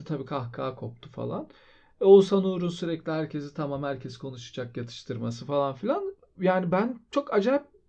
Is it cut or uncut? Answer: uncut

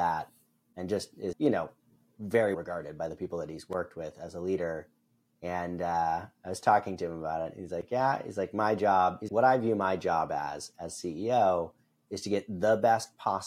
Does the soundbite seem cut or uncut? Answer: cut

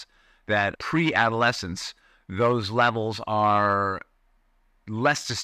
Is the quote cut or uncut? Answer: uncut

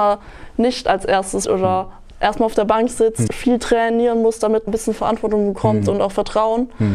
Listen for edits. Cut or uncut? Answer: cut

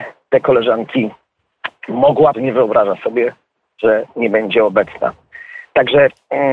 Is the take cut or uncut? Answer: cut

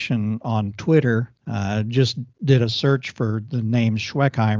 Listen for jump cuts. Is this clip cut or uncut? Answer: cut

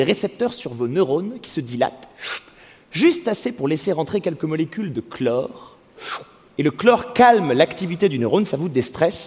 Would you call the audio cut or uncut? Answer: uncut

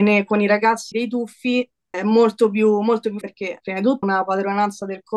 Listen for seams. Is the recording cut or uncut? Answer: cut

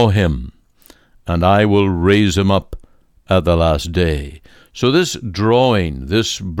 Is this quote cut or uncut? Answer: uncut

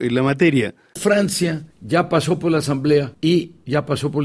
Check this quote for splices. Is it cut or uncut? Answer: uncut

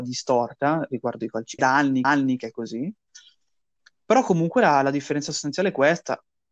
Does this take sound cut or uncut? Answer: cut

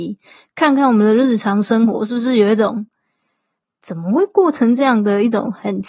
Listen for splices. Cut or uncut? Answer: uncut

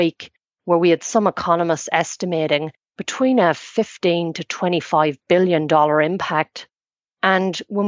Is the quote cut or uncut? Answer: uncut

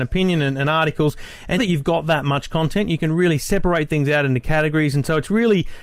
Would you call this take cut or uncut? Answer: cut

